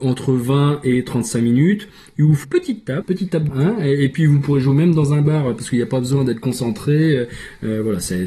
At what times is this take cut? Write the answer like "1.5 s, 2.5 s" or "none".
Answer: 2.4 s, 3.0 s, 3.5 s